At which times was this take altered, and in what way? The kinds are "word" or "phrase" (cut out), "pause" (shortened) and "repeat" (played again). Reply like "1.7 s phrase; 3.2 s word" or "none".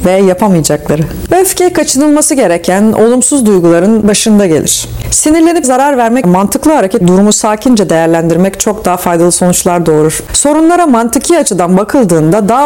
5.6 s word; 6.2 s word; 7.0 s word